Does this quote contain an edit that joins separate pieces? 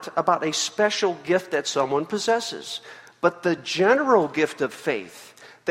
no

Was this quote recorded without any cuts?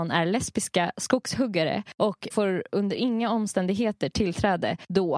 no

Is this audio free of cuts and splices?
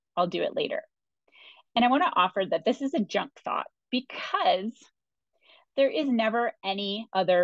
yes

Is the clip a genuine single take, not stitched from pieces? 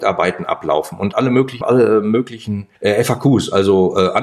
no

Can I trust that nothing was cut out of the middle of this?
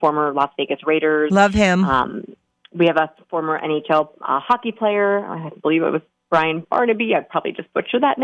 yes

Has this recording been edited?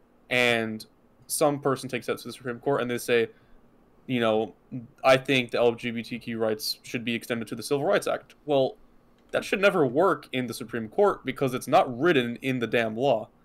no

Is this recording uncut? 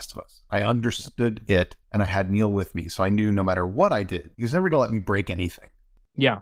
no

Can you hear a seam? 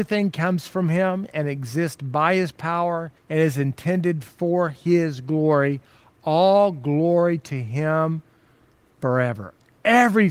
yes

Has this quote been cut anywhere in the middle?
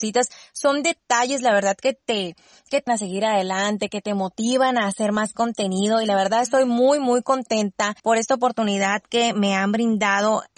yes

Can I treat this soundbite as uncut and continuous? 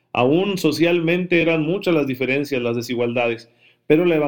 yes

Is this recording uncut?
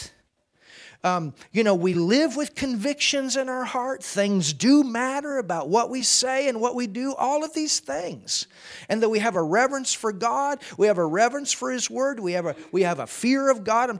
yes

